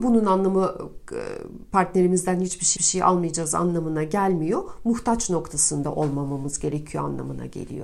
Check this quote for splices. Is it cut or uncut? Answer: cut